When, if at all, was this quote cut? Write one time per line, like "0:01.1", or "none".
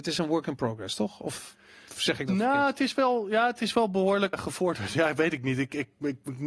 0:04.3